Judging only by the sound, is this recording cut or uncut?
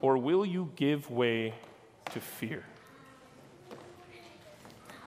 uncut